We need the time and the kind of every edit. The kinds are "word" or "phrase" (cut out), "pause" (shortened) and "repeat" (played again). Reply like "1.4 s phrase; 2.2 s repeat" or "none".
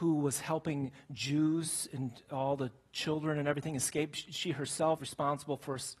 5.0 s word